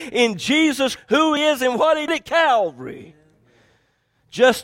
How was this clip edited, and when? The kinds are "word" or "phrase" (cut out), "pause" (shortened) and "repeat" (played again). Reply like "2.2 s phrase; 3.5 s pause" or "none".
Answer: 1.0 s word; 1.4 s word; 2.1 s word